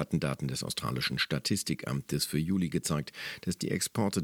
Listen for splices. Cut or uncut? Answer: uncut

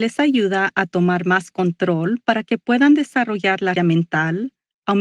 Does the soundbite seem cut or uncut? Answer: cut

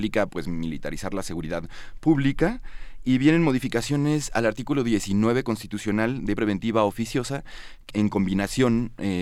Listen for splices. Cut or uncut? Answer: cut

